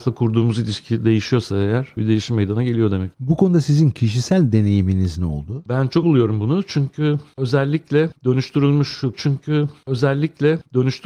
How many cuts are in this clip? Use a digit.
3